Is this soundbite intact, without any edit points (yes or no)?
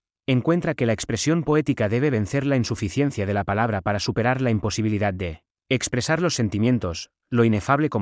yes